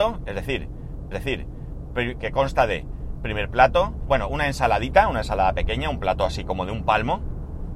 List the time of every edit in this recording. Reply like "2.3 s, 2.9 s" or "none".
1.1 s